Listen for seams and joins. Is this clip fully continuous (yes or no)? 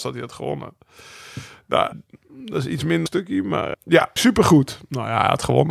no